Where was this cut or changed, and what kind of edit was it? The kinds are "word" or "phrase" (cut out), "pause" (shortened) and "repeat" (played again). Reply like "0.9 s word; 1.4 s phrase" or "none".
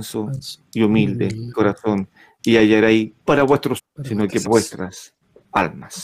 1.5 s word; 3.3 s phrase; 3.8 s word; 4.4 s word